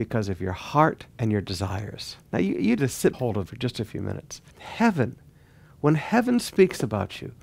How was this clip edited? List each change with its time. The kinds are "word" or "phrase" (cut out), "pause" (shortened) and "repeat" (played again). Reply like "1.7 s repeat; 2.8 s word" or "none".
1.1 s pause; 2.3 s pause; 2.8 s phrase; 3.1 s phrase; 3.5 s word; 4.5 s pause